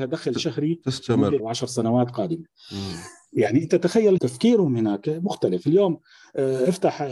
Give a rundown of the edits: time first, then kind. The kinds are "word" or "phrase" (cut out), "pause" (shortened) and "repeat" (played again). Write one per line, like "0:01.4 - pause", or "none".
0:01.4 - phrase
0:04.2 - word